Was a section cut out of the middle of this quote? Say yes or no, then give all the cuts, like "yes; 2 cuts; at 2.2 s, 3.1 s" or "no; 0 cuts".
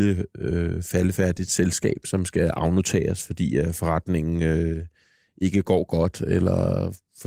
no; 0 cuts